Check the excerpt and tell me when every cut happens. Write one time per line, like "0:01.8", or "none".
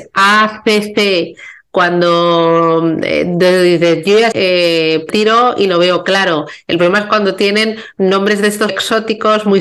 0:04.3
0:05.1
0:08.7